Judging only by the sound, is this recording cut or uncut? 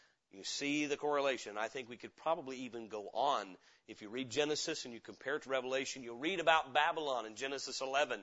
uncut